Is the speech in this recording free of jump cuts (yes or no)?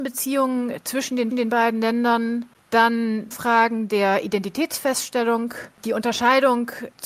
no